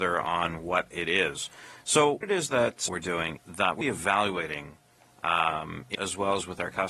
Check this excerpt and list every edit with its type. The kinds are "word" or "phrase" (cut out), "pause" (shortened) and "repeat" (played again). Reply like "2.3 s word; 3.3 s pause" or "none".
2.2 s word; 2.9 s word; 3.4 s word; 3.8 s word; 5.9 s word